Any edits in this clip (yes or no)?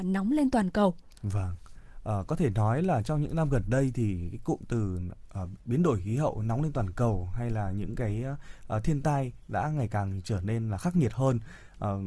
yes